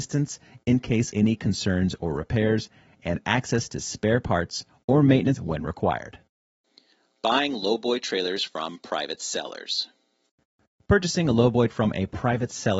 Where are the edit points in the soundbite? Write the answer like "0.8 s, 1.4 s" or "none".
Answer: 1.1 s, 5.4 s, 11.7 s